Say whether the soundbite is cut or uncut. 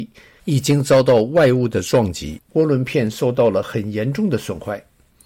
cut